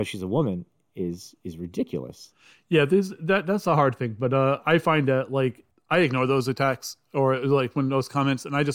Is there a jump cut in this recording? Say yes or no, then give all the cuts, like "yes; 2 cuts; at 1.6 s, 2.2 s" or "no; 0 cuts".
no; 0 cuts